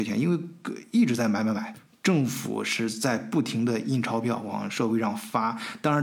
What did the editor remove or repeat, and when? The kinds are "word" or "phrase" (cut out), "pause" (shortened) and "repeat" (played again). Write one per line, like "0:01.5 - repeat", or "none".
none